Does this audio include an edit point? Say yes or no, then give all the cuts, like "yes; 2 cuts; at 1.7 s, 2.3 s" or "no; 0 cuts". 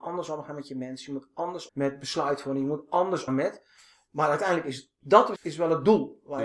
yes; 3 cuts; at 1.7 s, 3.3 s, 5.4 s